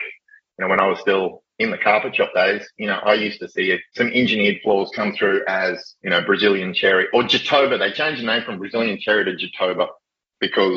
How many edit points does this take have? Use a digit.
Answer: 2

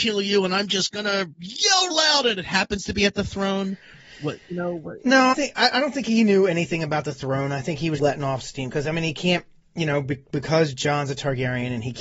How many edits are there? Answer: 3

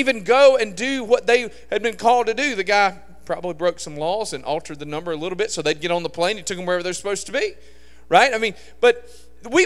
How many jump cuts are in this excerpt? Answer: 0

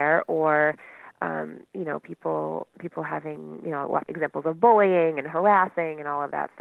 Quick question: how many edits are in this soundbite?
1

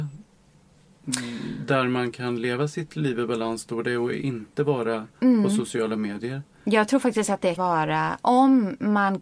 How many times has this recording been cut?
1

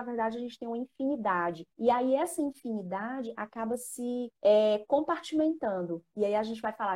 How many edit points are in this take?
2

